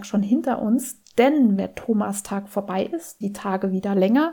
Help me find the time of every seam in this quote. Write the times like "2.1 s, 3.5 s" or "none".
1.6 s, 3.2 s